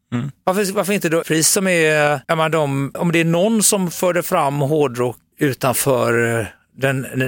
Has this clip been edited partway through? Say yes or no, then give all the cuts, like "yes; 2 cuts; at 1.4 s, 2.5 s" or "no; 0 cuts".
yes; 4 cuts; at 1.2 s, 2.2 s, 2.9 s, 5.3 s